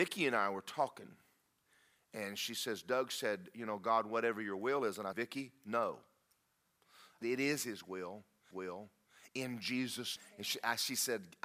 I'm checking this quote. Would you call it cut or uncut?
cut